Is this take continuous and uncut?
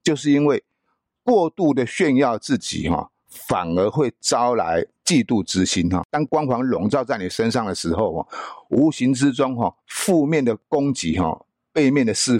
no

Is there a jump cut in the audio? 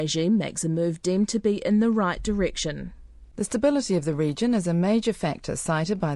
no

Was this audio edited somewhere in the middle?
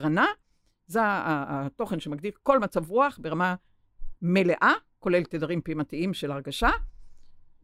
no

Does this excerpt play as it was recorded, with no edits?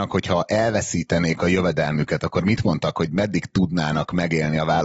yes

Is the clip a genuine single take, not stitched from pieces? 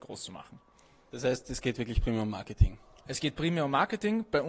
yes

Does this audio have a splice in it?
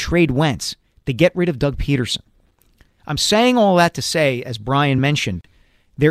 no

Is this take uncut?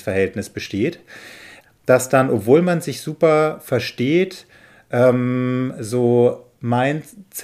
yes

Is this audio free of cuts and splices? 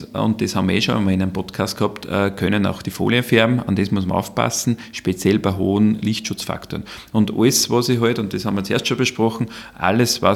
yes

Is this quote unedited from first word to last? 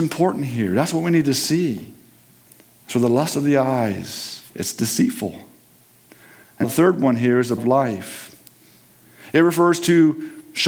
no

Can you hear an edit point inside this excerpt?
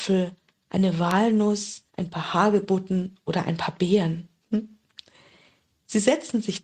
yes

